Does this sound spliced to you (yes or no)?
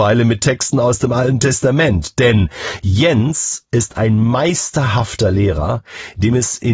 no